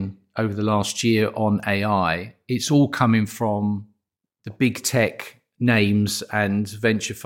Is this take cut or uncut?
uncut